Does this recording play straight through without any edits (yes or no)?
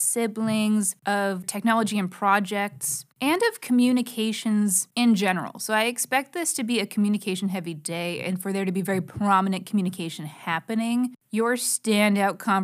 no